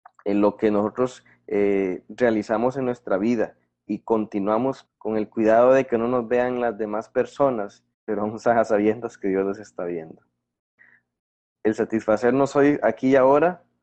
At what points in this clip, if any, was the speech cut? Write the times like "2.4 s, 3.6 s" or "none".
4.9 s, 7.9 s